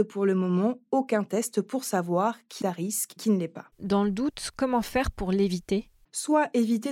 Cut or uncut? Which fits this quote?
cut